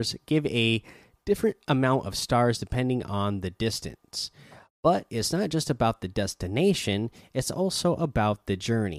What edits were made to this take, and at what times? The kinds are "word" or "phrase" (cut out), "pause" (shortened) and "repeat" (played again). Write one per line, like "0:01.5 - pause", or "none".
none